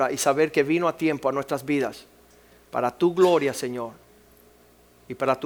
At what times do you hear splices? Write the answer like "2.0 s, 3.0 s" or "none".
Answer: none